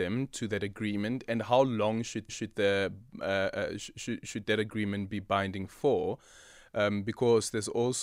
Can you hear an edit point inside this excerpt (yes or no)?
yes